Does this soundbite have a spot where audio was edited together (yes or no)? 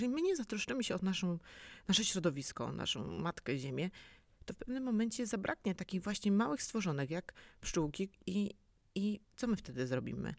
no